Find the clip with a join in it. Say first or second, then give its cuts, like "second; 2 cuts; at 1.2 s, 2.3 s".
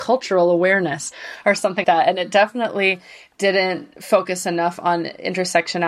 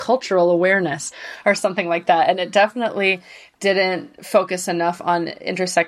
first; 1 cut; at 1.8 s